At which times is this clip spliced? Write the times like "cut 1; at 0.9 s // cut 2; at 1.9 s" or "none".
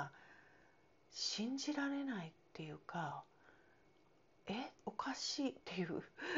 cut 1; at 4.8 s